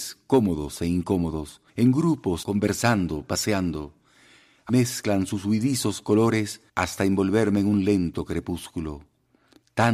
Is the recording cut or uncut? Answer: cut